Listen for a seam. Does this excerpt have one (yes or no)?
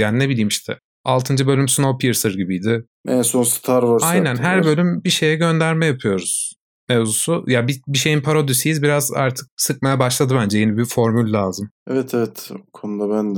yes